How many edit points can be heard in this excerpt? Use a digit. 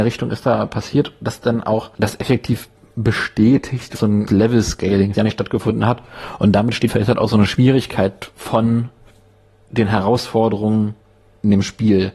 5